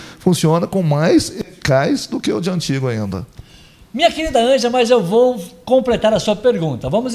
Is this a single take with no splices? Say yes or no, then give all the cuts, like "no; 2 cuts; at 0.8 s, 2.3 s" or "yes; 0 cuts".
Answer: yes; 0 cuts